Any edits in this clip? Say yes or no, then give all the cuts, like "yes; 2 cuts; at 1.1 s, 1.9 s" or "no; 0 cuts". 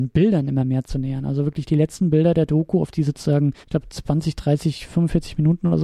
yes; 1 cut; at 3.6 s